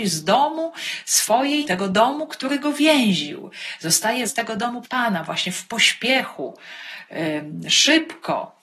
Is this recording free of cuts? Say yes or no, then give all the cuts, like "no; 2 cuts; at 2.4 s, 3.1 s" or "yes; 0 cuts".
no; 3 cuts; at 1.6 s, 4.2 s, 4.8 s